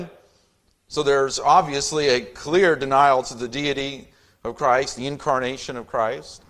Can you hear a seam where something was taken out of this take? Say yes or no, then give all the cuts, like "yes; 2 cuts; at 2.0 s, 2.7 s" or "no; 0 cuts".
no; 0 cuts